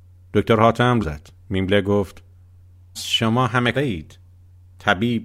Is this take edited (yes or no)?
yes